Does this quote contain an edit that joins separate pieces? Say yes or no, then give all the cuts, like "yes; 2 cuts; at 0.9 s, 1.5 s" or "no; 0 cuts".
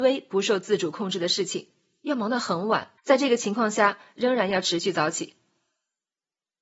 yes; 1 cut; at 3.0 s